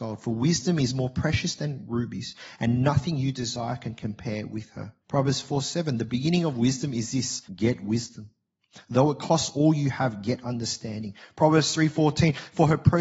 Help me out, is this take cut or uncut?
cut